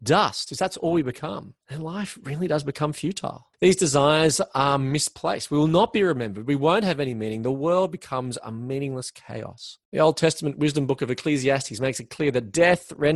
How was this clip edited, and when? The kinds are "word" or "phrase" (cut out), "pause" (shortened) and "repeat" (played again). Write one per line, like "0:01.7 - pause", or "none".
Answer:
0:01.6 - pause
0:03.5 - pause
0:09.8 - pause